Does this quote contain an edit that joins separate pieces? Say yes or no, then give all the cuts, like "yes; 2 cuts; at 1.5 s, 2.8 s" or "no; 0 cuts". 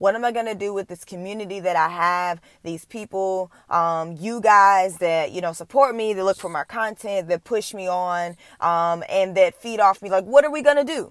no; 0 cuts